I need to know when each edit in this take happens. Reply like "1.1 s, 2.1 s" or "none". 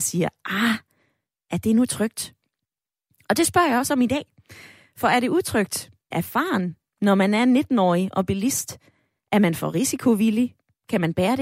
6.1 s